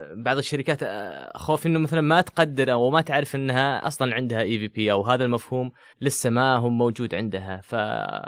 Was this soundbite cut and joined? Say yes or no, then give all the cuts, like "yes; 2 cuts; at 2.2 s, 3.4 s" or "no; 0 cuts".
yes; 1 cut; at 5.9 s